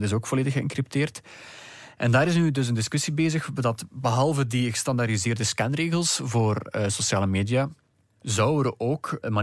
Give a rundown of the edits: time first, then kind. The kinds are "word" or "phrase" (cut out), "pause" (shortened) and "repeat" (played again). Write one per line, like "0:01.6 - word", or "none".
none